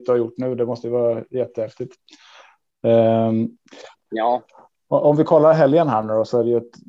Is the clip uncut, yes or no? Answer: yes